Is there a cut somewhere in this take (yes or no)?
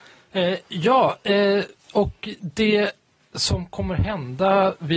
no